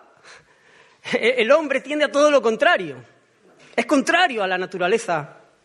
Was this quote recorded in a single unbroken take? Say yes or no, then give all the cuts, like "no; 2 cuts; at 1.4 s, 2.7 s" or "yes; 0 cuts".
yes; 0 cuts